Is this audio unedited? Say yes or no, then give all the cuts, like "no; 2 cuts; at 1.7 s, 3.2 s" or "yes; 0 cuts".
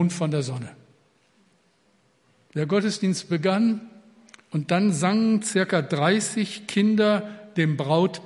yes; 0 cuts